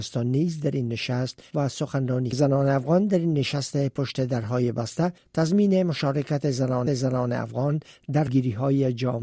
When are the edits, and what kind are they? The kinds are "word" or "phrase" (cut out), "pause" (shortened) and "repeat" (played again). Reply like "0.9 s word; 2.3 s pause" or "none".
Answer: 1.5 s word; 2.3 s phrase; 6.9 s repeat; 8.3 s word